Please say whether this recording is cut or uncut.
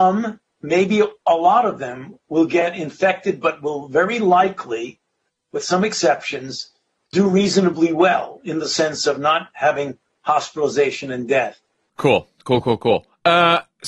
uncut